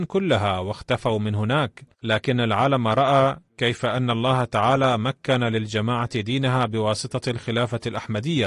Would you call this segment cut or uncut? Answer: cut